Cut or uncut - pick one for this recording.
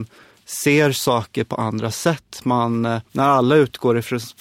cut